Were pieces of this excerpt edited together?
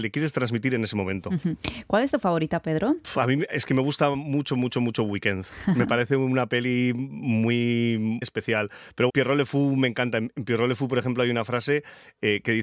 yes; 2 cuts; at 8.2 s, 9.1 s

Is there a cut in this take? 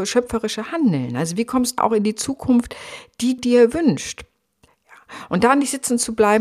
yes; 2 cuts; at 1.8 s, 3.4 s

